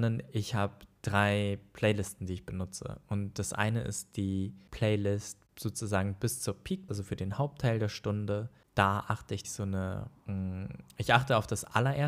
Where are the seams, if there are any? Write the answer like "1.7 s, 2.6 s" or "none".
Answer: 6.9 s, 9.4 s, 10.2 s